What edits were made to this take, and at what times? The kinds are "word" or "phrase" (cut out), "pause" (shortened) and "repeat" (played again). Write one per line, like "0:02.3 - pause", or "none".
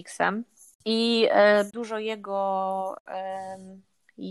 0:01.7 - word